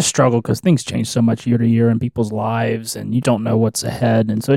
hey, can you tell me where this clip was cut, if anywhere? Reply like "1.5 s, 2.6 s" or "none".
3.2 s